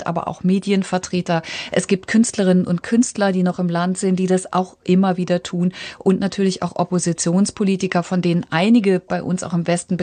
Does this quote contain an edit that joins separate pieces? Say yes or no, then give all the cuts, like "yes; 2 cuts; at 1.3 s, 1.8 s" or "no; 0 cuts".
no; 0 cuts